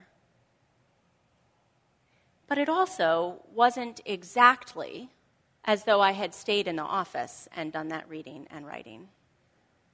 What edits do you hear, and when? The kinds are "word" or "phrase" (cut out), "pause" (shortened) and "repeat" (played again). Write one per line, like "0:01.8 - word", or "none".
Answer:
0:05.3 - pause